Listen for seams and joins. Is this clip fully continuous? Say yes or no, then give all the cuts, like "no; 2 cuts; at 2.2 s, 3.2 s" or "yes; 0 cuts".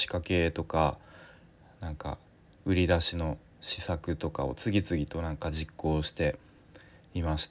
yes; 0 cuts